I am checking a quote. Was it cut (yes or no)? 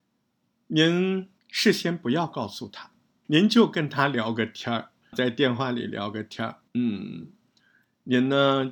yes